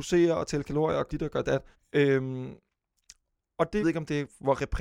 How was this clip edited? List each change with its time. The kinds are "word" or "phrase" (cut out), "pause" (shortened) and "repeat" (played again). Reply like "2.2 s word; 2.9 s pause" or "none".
1.1 s word; 1.7 s pause; 3.8 s phrase